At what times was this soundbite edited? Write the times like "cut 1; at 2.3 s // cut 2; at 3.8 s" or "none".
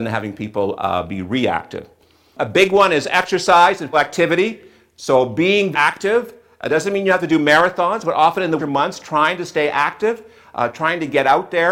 cut 1; at 3.9 s // cut 2; at 5.7 s // cut 3; at 8.6 s